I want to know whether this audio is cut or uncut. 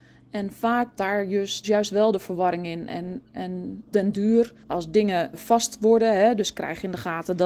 cut